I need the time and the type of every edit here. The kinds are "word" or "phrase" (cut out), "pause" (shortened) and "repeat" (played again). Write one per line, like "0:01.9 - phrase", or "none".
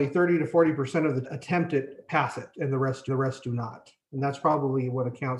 0:01.2 - phrase
0:03.1 - repeat

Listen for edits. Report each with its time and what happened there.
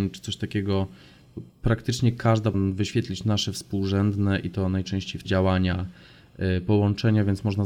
0:01.5 - pause
0:02.5 - word
0:05.2 - word

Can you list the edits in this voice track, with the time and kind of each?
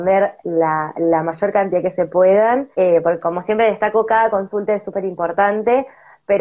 0:02.7 - pause

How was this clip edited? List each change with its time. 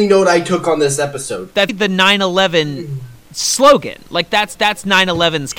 0:01.7 - word
0:04.5 - repeat

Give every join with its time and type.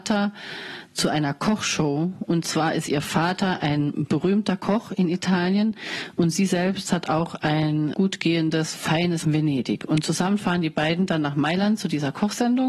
0:07.9 - word
0:09.2 - phrase

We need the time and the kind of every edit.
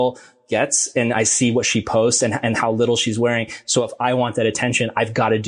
none

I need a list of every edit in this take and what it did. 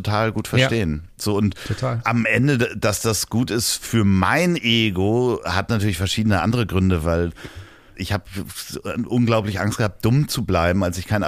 0:07.9 - phrase

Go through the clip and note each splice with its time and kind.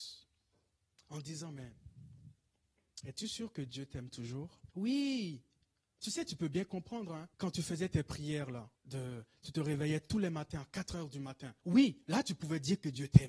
0:04.7 - pause
0:07.3 - pause
0:08.7 - pause
0:11.6 - pause

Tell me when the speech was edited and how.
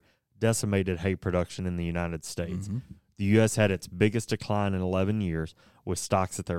none

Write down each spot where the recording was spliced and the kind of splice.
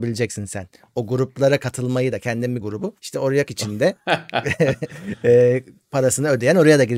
0:02.6 - phrase
0:03.0 - pause
0:03.5 - word

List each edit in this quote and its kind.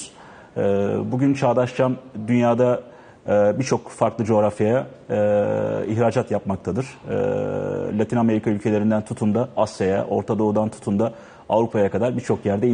none

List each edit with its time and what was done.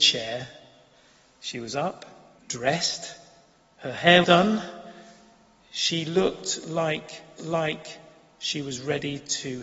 0:02.4 - pause
0:04.2 - word
0:07.4 - repeat

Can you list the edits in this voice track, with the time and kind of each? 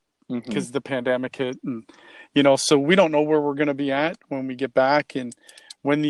none

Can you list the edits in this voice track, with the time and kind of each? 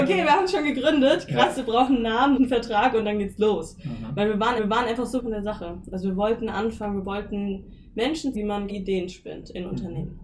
0:02.4 - word
0:04.6 - repeat
0:05.2 - word
0:08.3 - word
0:08.7 - phrase

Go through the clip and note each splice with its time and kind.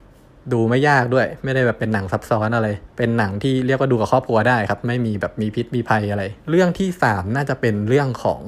0:02.9 - pause
0:06.4 - pause

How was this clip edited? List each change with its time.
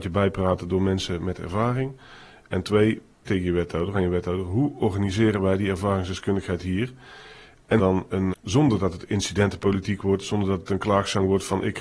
0:03.3 - word
0:03.9 - phrase
0:07.8 - phrase
0:08.3 - word

